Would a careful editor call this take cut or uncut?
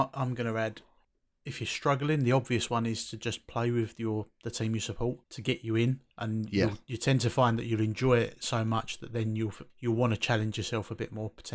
cut